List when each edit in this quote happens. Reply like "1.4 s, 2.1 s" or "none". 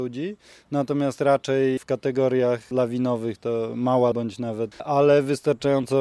1.8 s, 4.1 s, 4.7 s